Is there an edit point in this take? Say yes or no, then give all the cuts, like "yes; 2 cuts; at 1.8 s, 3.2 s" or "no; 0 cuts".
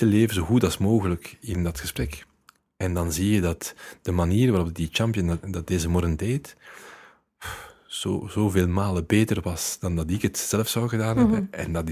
no; 0 cuts